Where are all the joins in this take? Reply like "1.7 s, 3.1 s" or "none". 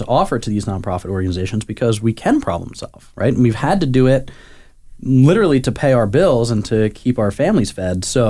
none